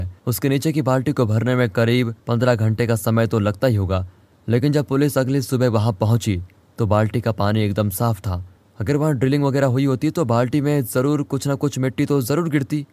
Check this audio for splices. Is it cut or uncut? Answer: uncut